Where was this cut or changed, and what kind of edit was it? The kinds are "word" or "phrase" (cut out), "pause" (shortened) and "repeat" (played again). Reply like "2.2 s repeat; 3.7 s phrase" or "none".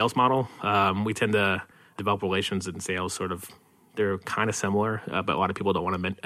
none